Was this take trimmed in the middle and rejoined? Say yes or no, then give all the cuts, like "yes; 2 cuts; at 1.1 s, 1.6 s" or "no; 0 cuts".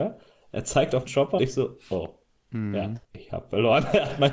yes; 2 cuts; at 1.1 s, 1.4 s